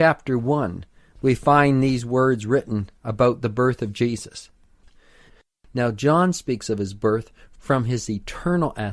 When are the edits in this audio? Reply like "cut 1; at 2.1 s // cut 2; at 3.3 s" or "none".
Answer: none

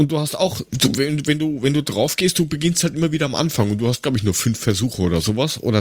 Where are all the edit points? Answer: none

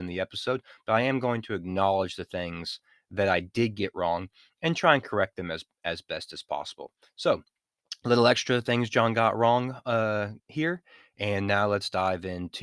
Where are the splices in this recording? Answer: cut 1; at 10.4 s

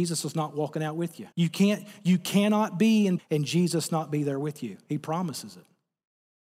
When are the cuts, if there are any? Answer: cut 1; at 1.3 s // cut 2; at 3.2 s

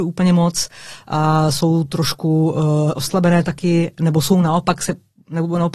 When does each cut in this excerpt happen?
none

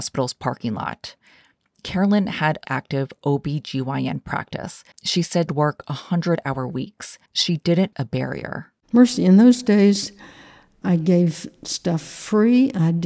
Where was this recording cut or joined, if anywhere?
cut 1; at 2.6 s // cut 2; at 4.9 s // cut 3; at 5.5 s // cut 4; at 7.3 s // cut 5; at 7.9 s // cut 6; at 10.8 s

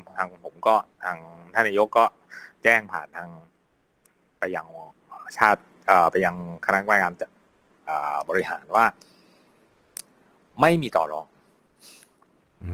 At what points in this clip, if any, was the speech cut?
cut 1; at 0.9 s

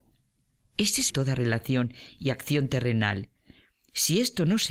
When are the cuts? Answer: cut 1; at 1.1 s

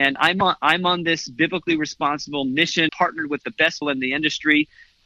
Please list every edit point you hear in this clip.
cut 1; at 2.9 s // cut 2; at 3.8 s

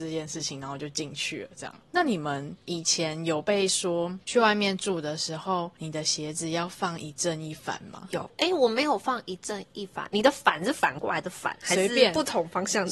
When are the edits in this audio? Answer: cut 1; at 1.8 s

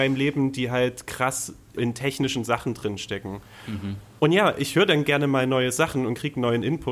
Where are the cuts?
cut 1; at 1.8 s

